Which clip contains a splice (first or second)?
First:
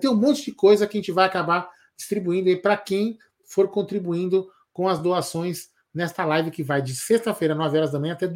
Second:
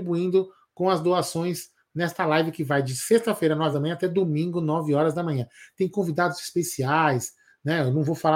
second